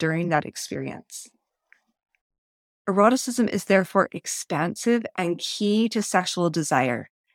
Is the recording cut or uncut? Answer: uncut